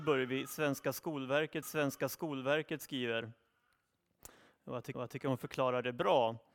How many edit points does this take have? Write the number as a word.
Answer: two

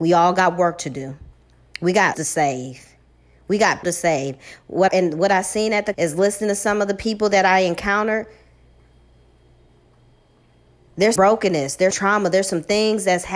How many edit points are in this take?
six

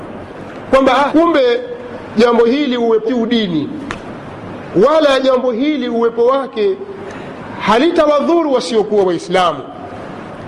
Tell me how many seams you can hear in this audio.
two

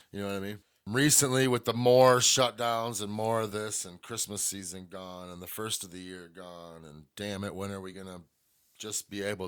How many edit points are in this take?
zero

